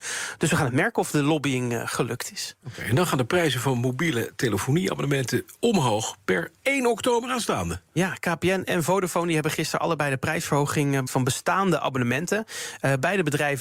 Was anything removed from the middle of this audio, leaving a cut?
yes; 1 cut; at 11.1 s

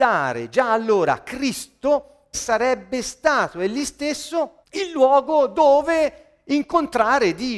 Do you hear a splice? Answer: yes; 2 cuts; at 2.3 s, 4.6 s

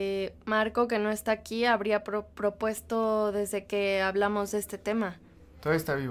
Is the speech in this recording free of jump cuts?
no; 1 cut; at 2.3 s

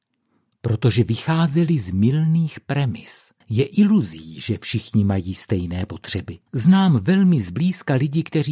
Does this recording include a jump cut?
yes; 2 cuts; at 3.4 s, 6.5 s

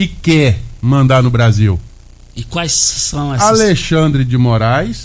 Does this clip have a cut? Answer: no; 0 cuts

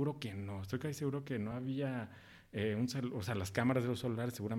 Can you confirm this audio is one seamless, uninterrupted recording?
yes; 0 cuts

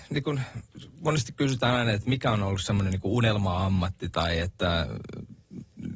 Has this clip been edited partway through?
no; 0 cuts

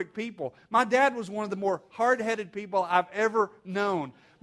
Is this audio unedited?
yes; 0 cuts

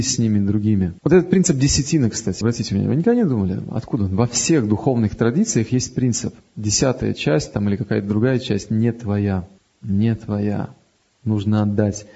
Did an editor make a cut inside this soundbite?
yes; 3 cuts; at 1.0 s, 2.4 s, 9.6 s

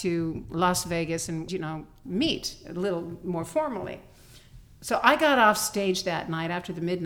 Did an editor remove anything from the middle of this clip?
yes; 1 cut; at 1.5 s

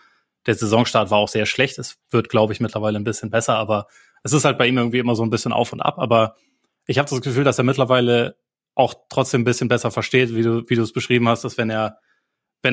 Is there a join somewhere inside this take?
no; 0 cuts

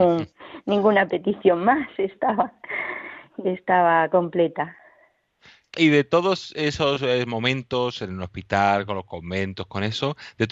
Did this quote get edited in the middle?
yes; 1 cut; at 5.7 s

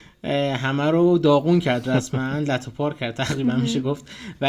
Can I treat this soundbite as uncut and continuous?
yes; 0 cuts

